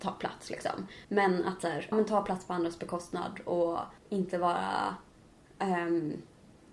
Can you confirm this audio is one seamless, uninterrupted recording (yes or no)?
no